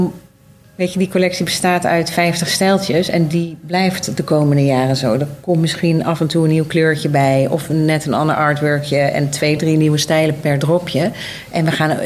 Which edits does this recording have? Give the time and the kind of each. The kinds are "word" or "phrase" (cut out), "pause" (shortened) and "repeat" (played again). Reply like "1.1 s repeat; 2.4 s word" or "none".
none